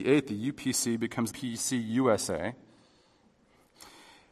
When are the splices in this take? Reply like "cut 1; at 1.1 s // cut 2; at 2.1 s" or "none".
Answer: cut 1; at 1.3 s